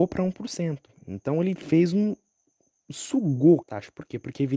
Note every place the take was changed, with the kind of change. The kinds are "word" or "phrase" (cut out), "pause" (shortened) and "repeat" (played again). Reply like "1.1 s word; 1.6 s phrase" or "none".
3.6 s word